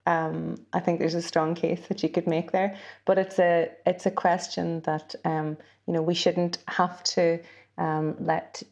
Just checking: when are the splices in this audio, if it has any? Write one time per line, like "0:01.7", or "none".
none